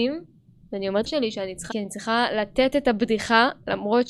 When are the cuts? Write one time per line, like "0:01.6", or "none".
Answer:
0:01.1
0:01.7